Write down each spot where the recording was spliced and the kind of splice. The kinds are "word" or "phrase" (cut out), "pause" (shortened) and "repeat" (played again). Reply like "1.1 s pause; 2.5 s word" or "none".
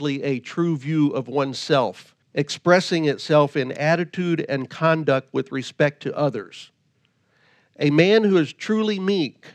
2.2 s pause